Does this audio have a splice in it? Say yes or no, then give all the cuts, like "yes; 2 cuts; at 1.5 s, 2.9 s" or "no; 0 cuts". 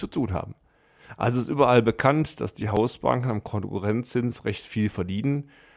no; 0 cuts